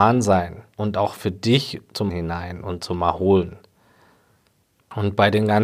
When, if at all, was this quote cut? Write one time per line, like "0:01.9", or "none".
0:02.1